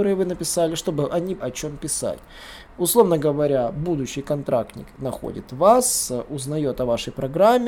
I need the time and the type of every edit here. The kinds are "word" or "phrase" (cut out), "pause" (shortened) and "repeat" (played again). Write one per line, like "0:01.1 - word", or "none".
0:01.4 - word